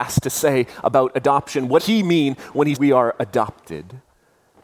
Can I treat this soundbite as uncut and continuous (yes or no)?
no